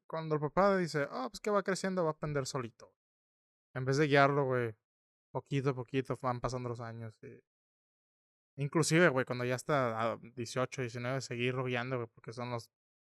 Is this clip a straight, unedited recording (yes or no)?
yes